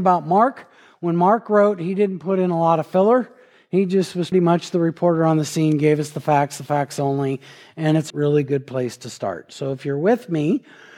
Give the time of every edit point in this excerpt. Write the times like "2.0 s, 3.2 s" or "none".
4.3 s, 8.1 s